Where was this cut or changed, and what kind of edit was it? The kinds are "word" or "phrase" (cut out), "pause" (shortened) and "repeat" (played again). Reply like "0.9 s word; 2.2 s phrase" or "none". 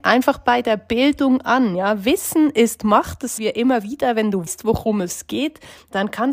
3.4 s word; 4.5 s word